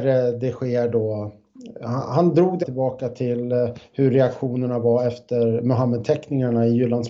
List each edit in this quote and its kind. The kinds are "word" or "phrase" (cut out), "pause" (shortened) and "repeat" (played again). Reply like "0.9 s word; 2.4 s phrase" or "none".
2.6 s word